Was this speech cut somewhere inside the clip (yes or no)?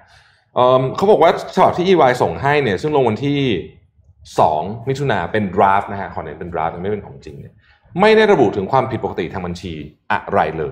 no